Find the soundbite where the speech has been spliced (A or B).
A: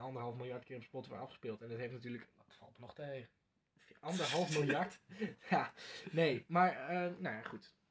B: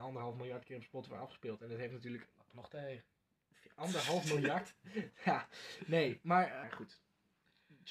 B